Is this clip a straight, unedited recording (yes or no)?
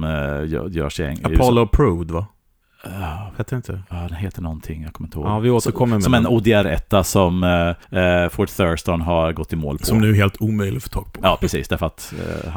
no